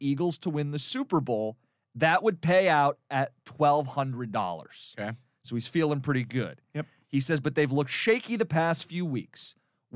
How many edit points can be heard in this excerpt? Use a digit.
0